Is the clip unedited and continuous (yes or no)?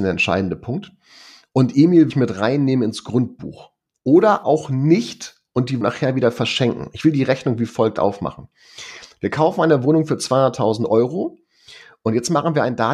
no